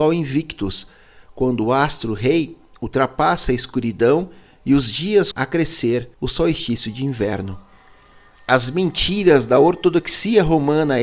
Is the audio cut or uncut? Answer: cut